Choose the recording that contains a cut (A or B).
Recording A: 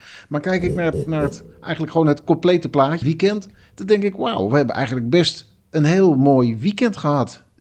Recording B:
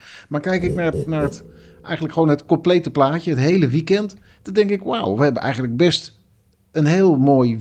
A